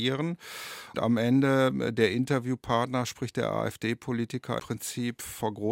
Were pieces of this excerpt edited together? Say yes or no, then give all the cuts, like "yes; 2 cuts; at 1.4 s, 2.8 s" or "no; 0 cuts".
yes; 2 cuts; at 0.9 s, 4.6 s